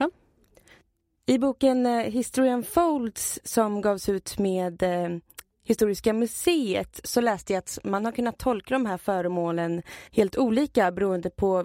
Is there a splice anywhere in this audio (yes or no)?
yes